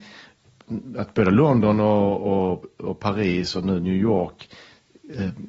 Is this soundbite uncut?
yes; 0 cuts

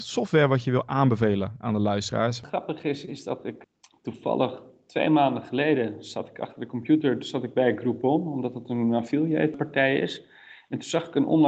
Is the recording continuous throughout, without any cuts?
yes; 0 cuts

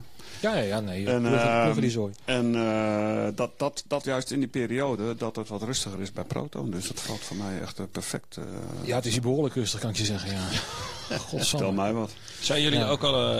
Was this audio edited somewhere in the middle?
yes; 1 cut; at 4.0 s

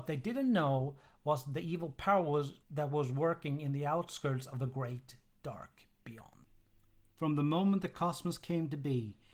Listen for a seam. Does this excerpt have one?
no; 0 cuts

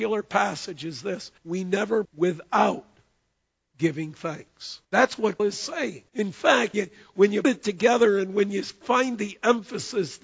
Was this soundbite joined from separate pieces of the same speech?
yes; 7 cuts; at 1.4 s, 2.0 s, 4.8 s, 5.4 s, 6.1 s, 6.7 s, 7.4 s

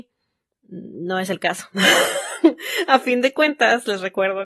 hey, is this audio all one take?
yes; 0 cuts

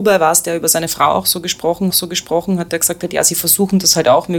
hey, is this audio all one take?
no; 1 cut; at 1.9 s

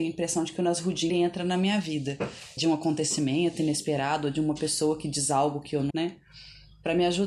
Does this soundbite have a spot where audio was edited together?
yes; 3 cuts; at 1.1 s, 2.6 s, 5.9 s

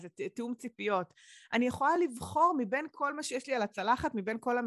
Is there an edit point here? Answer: no; 0 cuts

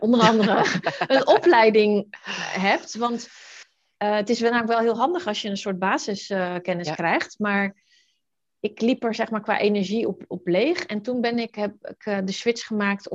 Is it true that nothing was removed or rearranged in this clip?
yes; 0 cuts

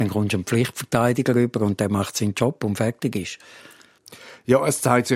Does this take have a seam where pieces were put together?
no; 0 cuts

